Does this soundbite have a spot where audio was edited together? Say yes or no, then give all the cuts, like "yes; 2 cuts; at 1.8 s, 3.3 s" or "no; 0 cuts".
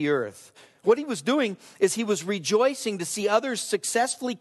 no; 0 cuts